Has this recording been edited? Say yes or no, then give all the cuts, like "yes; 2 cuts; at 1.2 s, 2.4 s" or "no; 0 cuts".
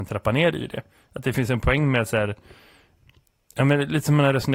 no; 0 cuts